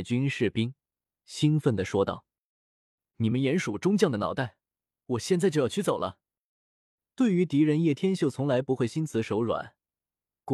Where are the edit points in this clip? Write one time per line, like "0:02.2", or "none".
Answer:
none